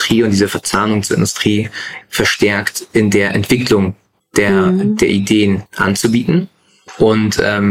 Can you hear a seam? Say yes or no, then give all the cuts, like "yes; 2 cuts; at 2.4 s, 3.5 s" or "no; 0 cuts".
yes; 3 cuts; at 2.0 s, 4.2 s, 5.7 s